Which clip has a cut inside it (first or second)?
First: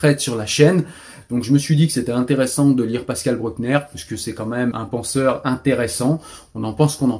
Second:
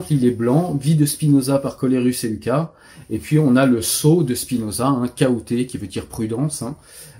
first